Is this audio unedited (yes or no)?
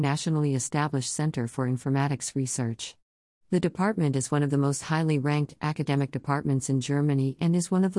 yes